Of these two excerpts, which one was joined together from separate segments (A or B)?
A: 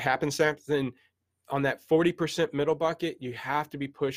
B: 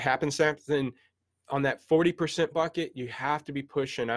B